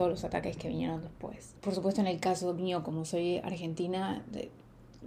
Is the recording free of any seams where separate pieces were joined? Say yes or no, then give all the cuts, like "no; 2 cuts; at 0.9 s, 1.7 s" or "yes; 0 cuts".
yes; 0 cuts